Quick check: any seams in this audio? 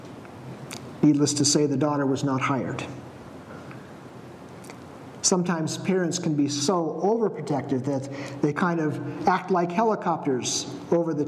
no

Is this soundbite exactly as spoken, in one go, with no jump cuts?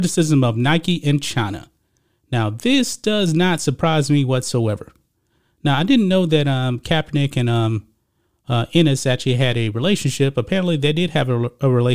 yes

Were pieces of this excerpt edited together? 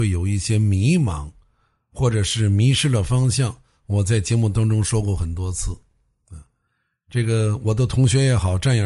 no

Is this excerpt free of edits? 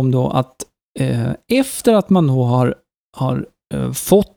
yes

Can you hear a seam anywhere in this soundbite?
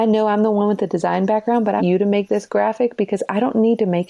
yes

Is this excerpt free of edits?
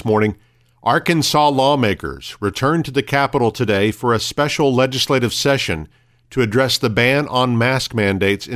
yes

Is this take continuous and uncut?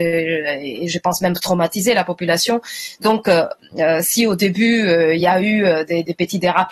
yes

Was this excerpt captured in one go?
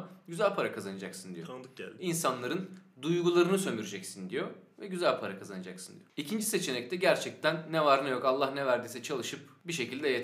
yes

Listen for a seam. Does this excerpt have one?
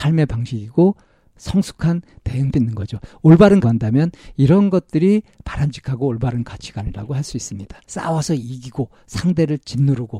yes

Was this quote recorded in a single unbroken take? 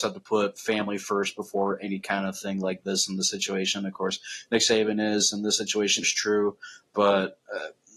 no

